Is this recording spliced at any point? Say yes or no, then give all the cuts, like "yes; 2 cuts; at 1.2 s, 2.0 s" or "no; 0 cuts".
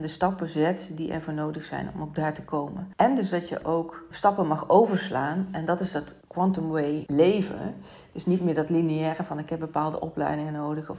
no; 0 cuts